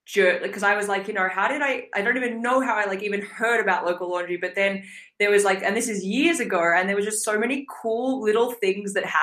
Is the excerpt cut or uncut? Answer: uncut